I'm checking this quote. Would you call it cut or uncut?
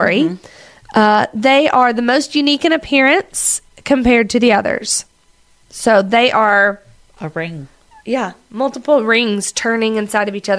uncut